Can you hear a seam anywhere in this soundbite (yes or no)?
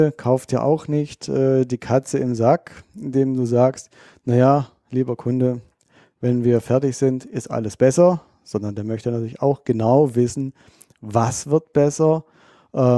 no